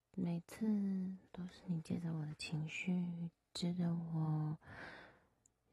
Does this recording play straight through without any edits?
no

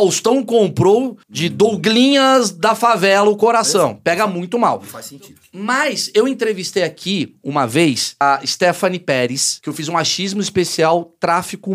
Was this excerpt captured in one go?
no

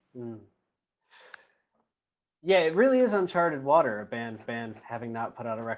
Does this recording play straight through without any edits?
no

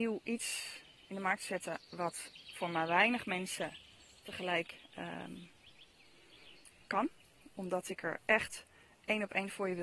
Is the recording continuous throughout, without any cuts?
yes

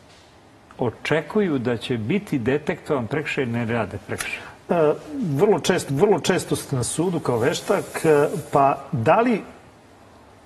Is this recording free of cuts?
no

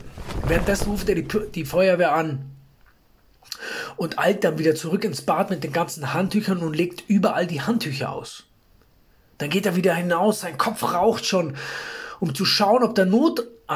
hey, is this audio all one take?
yes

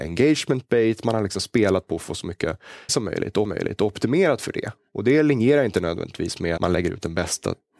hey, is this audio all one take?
no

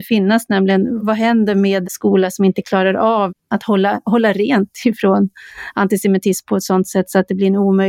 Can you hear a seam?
yes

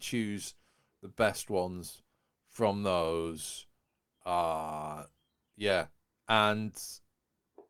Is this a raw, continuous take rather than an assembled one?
yes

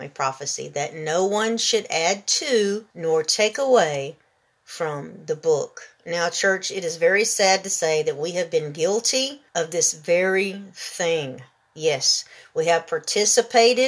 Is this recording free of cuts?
no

